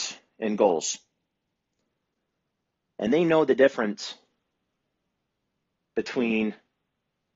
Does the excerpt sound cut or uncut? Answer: uncut